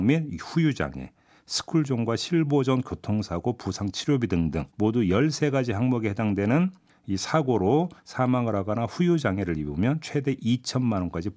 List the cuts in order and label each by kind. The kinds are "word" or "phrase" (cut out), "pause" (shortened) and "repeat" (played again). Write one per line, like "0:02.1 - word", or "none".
0:04.7 - pause
0:06.9 - pause
0:08.0 - pause